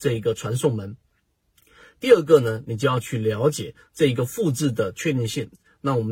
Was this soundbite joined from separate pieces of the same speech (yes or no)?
no